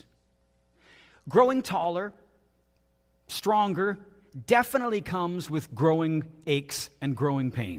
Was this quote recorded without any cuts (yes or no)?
yes